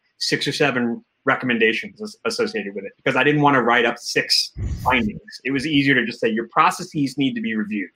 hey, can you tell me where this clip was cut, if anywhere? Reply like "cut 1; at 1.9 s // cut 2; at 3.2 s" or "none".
none